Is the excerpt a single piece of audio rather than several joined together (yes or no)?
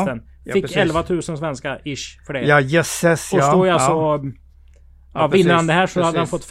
yes